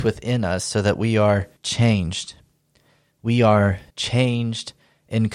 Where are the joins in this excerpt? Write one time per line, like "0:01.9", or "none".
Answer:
0:01.6
0:03.9

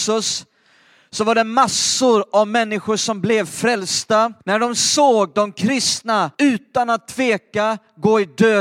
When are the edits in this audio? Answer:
0:04.4
0:06.3

